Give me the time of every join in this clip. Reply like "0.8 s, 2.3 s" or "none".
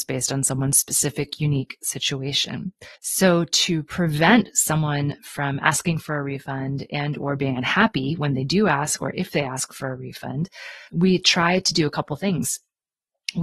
3.0 s, 10.9 s